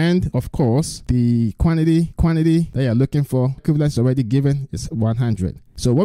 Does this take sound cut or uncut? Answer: cut